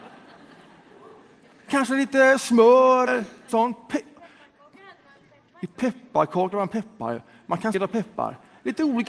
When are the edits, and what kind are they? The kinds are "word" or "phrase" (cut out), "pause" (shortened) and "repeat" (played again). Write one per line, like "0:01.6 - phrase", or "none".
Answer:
0:01.7 - word
0:03.1 - word
0:03.5 - word
0:06.5 - word
0:07.7 - word